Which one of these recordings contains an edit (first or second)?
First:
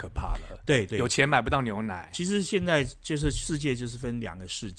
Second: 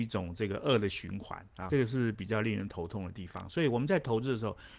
second